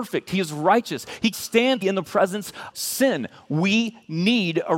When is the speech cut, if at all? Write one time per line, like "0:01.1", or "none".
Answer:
0:01.3
0:01.8
0:02.7

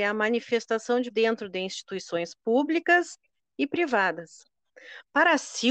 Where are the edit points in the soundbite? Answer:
0:01.1

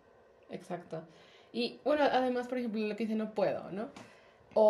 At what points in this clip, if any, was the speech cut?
none

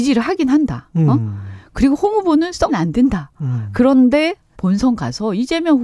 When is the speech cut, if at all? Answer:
0:02.7
0:04.5

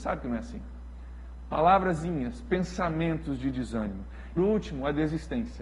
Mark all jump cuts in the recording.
0:04.4

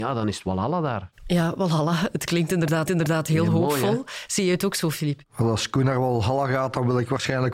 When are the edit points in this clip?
0:02.9

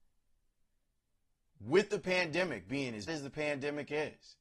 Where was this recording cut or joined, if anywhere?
0:03.1

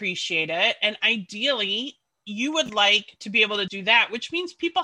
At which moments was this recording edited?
0:03.7

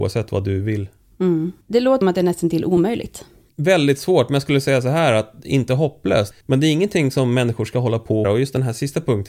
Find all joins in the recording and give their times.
0:01.6
0:02.0
0:06.4
0:08.2

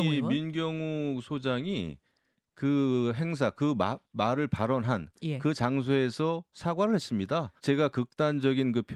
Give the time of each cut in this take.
0:07.6

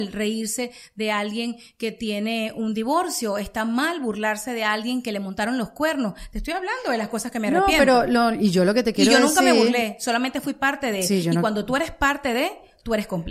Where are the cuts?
none

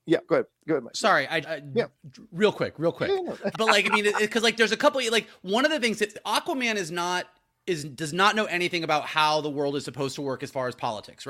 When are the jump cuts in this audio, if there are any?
0:01.4
0:03.5

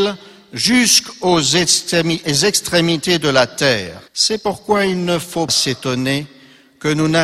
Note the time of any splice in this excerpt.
0:04.1
0:05.5

